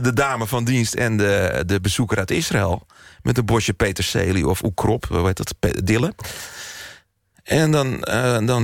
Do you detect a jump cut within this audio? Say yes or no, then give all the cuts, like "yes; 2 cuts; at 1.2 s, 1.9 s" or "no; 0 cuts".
no; 0 cuts